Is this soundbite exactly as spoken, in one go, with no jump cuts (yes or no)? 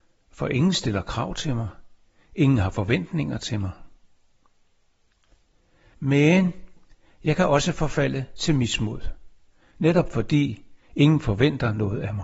yes